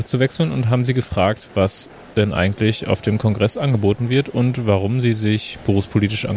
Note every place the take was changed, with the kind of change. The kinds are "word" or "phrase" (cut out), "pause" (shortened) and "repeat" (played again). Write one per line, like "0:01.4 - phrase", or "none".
none